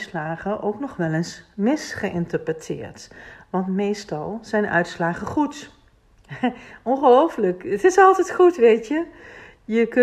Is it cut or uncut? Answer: uncut